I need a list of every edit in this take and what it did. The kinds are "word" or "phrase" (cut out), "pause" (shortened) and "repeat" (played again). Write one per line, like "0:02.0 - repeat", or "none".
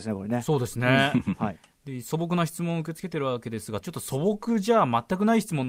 0:03.8 - phrase